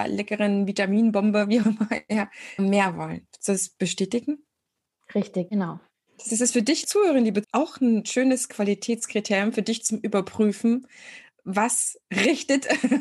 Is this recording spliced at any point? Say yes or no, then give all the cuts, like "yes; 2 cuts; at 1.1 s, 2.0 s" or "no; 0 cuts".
yes; 6 cuts; at 1.6 s, 2.6 s, 5.5 s, 6.3 s, 6.8 s, 7.4 s